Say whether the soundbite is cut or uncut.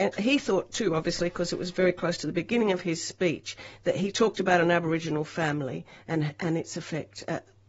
uncut